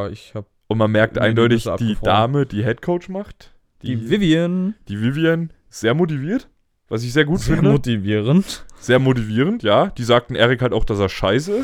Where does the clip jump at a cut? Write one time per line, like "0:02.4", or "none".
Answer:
none